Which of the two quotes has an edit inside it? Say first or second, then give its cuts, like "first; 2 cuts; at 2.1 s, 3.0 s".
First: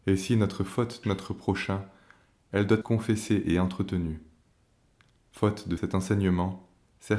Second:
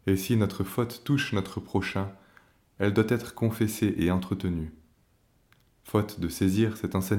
first; 3 cuts; at 1.0 s, 2.8 s, 5.8 s